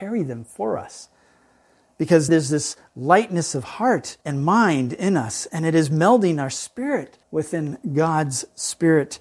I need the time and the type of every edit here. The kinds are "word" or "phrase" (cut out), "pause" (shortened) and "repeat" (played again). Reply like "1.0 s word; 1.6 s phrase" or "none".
2.3 s word; 4.2 s pause; 7.2 s pause